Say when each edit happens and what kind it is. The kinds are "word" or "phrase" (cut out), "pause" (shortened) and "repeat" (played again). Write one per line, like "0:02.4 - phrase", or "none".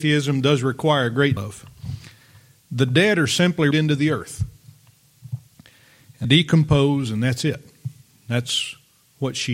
0:01.4 - word
0:03.7 - word
0:06.2 - word